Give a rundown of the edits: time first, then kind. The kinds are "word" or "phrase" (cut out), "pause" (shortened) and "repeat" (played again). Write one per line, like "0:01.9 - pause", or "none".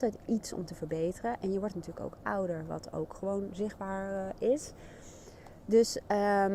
none